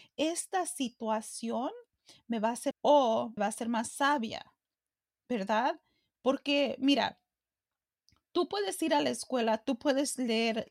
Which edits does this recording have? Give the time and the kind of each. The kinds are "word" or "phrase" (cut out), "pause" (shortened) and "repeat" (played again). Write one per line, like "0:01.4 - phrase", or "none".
0:02.7 - phrase
0:03.4 - word